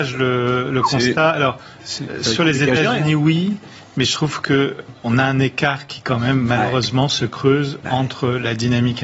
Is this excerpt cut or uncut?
uncut